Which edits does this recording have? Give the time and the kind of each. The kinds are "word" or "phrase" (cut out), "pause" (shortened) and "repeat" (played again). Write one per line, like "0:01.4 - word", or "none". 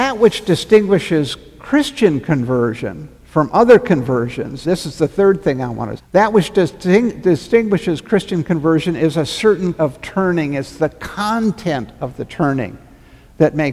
0:03.1 - pause
0:04.6 - word
0:06.0 - word
0:09.7 - word